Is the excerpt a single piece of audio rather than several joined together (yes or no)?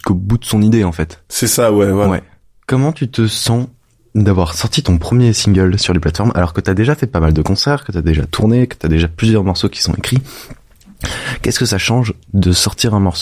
yes